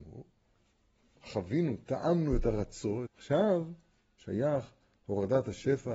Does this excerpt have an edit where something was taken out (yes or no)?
yes